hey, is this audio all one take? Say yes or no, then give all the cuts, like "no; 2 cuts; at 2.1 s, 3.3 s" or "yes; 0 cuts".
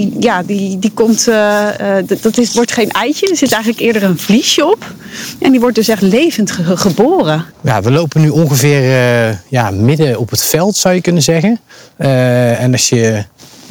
no; 1 cut; at 7.5 s